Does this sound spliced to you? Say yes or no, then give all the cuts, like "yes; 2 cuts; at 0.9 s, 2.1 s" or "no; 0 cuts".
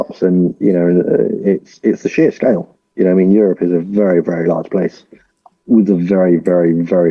no; 0 cuts